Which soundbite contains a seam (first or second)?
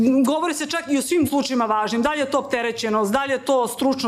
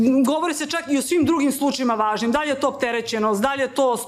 first